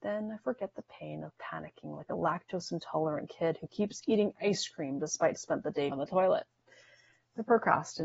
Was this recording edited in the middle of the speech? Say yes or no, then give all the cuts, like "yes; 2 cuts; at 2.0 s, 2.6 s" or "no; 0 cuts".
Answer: yes; 2 cuts; at 5.4 s, 5.9 s